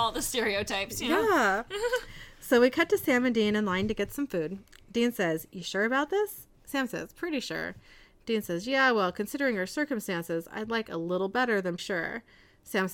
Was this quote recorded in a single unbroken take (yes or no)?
no